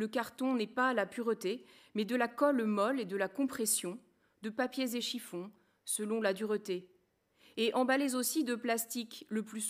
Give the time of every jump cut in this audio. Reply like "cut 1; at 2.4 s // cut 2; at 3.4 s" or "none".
none